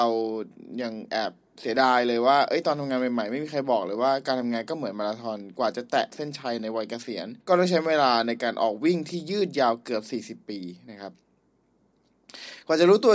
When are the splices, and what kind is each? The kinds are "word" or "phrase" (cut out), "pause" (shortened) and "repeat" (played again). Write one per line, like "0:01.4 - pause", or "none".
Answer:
0:07.4 - pause